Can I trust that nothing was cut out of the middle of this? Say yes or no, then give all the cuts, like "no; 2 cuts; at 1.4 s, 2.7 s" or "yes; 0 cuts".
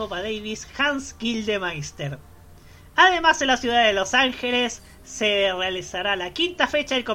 yes; 0 cuts